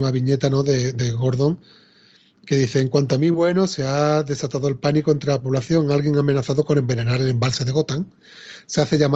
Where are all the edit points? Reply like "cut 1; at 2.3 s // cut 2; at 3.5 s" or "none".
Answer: none